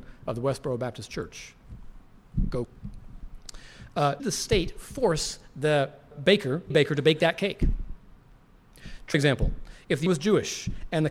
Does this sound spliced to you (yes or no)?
yes